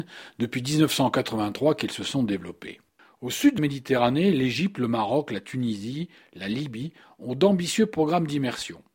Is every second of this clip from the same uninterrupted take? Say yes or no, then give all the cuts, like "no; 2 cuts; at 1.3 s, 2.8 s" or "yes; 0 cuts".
no; 1 cut; at 3.6 s